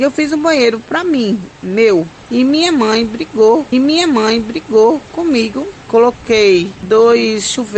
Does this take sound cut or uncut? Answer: cut